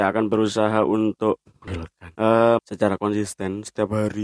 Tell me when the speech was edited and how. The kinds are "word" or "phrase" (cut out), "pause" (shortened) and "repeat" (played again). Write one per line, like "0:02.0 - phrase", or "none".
0:01.5 - word
0:02.6 - phrase